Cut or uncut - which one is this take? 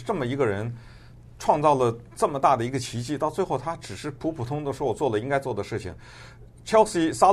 uncut